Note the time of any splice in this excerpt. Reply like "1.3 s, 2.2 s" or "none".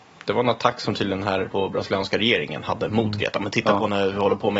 1.5 s